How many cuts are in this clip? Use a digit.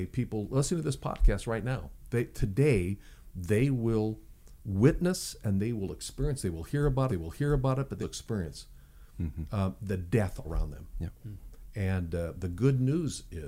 3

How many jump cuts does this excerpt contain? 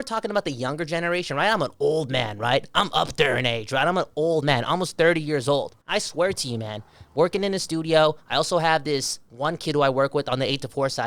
2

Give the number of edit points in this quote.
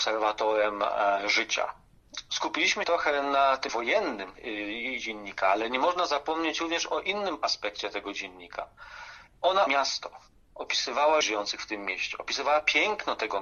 4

